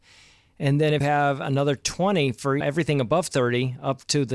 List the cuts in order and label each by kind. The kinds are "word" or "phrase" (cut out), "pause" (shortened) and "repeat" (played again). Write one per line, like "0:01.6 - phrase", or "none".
0:01.0 - word
0:02.6 - word